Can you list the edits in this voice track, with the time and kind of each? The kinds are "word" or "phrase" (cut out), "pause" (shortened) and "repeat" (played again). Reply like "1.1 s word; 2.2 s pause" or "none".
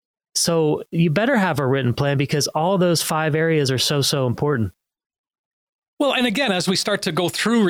none